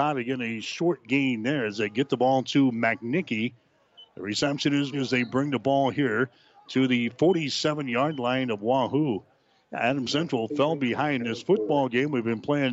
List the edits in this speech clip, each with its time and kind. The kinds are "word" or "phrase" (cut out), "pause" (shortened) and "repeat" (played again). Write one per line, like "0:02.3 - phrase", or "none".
0:04.9 - word
0:11.2 - word